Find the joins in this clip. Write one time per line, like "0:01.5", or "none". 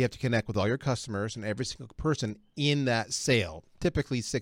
none